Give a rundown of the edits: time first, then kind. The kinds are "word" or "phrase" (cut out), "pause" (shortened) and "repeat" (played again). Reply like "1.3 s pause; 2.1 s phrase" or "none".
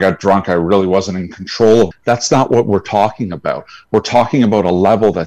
1.9 s word

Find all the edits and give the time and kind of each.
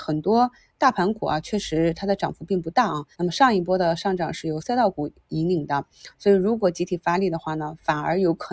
3.1 s pause

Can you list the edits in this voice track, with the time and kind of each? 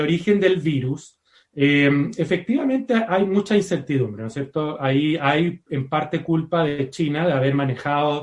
1.3 s pause

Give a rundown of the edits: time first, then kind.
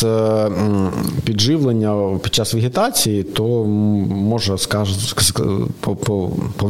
none

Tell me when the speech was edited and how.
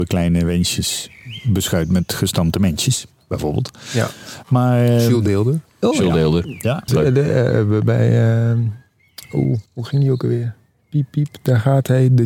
5.7 s pause; 6.9 s word; 9.7 s pause; 10.7 s pause

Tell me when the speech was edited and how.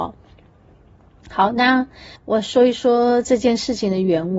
2.2 s pause

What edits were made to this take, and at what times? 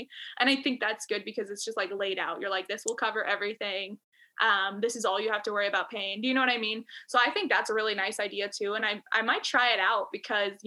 none

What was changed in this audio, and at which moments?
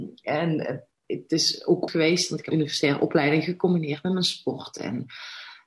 0.9 s pause; 1.9 s word; 2.5 s word

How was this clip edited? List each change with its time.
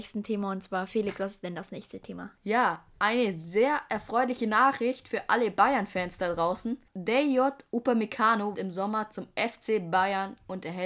2.4 s pause; 6.9 s pause; 8.5 s word

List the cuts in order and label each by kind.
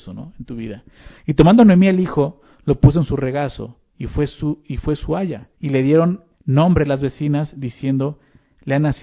3.9 s pause; 5.5 s pause; 6.3 s pause

